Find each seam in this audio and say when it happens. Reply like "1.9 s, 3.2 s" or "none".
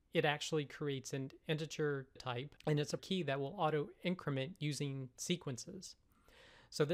2.2 s, 2.6 s, 3.0 s